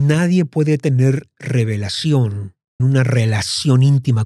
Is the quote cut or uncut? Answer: cut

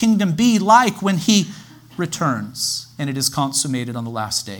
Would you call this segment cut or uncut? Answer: uncut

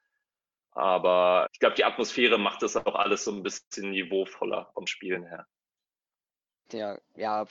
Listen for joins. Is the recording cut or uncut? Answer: cut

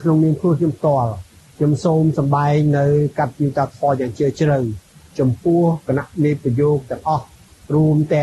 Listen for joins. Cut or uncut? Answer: uncut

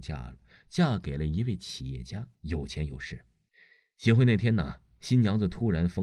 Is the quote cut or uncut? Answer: cut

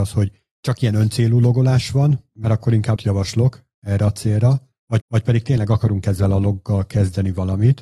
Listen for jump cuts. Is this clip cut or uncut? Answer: cut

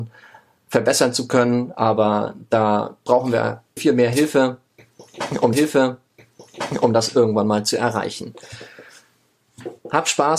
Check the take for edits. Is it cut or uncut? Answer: cut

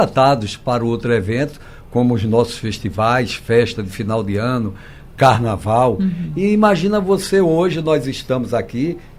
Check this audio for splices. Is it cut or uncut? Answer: uncut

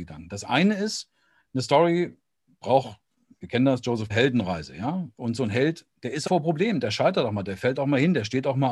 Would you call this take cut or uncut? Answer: cut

